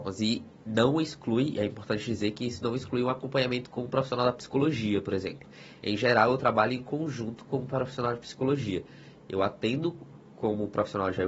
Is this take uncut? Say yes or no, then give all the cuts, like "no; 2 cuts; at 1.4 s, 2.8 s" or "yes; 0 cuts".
yes; 0 cuts